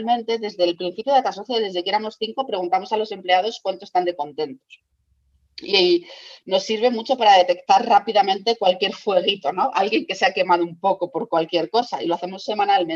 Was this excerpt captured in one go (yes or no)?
yes